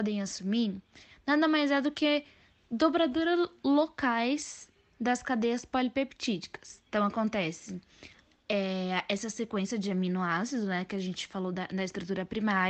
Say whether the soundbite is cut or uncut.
uncut